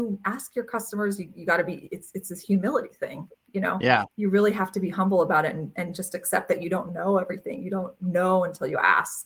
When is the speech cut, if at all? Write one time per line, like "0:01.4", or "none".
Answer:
0:04.1